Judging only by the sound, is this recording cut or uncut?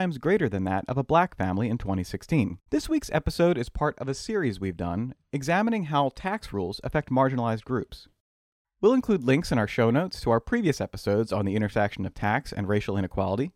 cut